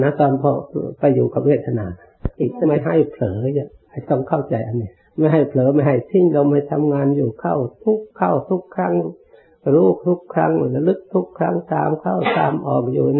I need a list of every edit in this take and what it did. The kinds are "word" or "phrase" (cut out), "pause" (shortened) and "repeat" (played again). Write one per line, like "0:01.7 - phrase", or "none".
0:05.0 - pause
0:08.1 - pause